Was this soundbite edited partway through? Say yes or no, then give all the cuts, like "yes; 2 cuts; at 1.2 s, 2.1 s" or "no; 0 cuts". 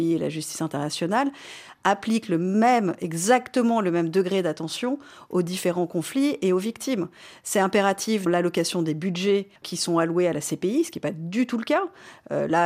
yes; 2 cuts; at 8.3 s, 9.6 s